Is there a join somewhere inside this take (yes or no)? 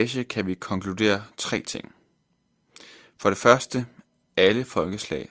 no